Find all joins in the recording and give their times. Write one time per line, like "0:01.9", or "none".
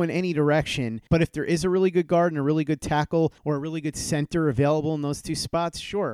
0:01.1
0:03.4